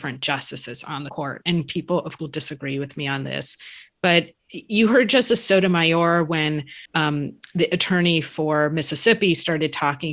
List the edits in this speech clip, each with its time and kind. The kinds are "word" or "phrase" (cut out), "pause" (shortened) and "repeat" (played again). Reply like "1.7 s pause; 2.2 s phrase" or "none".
1.1 s word; 2.2 s word; 4.4 s pause; 6.9 s pause